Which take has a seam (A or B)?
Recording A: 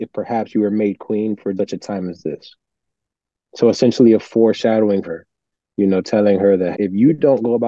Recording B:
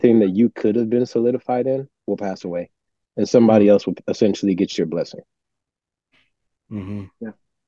A